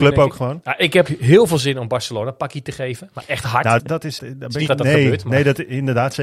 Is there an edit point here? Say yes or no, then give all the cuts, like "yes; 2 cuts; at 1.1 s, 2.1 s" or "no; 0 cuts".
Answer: yes; 4 cuts; at 1.1 s, 3.8 s, 4.2 s, 4.7 s